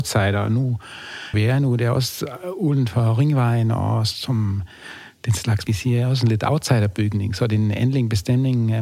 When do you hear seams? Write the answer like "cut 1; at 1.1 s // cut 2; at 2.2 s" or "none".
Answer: cut 1; at 1.3 s // cut 2; at 5.7 s